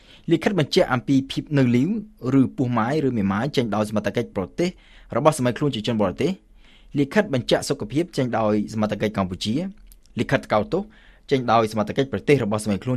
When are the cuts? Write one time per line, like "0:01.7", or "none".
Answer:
none